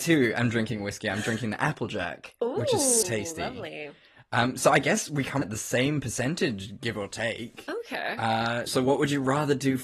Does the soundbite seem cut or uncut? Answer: cut